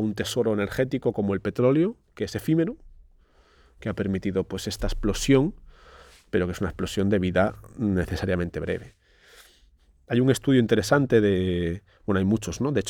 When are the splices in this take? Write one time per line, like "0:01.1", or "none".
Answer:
none